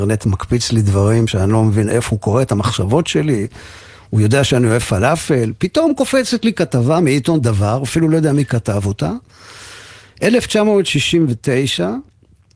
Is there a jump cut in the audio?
no; 0 cuts

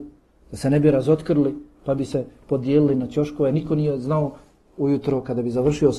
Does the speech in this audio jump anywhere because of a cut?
no; 0 cuts

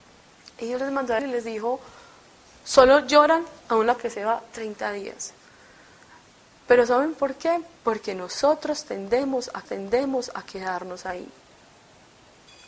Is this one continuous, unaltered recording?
no; 5 cuts; at 1.2 s, 3.6 s, 4.0 s, 7.8 s, 9.7 s

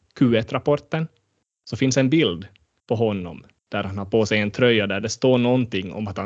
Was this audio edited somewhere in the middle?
no; 0 cuts

